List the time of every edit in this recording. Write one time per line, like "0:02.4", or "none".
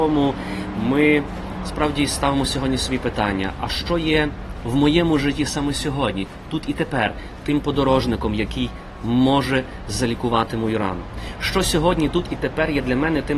none